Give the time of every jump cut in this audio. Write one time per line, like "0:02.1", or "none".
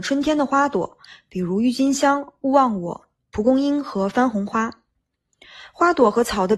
none